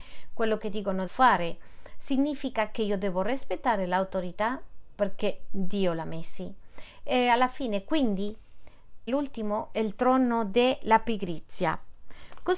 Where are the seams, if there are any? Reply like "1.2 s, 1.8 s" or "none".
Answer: 1.1 s, 9.1 s